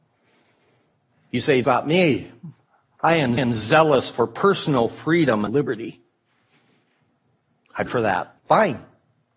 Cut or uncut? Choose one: cut